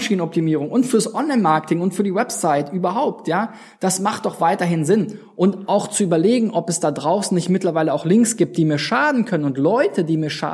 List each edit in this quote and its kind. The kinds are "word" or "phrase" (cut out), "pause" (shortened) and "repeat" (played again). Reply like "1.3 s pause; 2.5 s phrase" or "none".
none